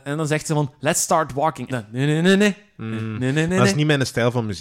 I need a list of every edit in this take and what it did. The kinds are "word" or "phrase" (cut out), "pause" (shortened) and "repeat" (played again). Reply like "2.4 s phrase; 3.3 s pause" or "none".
1.7 s phrase